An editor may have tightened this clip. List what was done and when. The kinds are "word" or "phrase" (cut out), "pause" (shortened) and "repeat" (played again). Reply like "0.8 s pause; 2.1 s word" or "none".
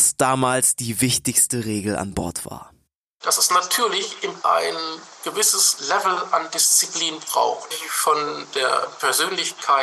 3.0 s pause; 4.4 s word; 7.7 s word